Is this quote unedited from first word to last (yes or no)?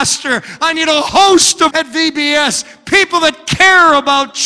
no